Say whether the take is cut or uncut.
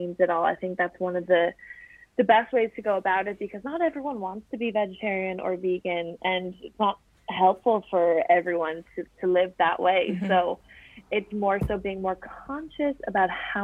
uncut